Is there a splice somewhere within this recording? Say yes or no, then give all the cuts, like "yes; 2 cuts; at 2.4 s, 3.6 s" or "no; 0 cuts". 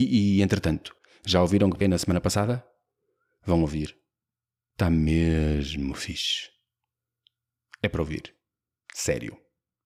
yes; 1 cut; at 1.8 s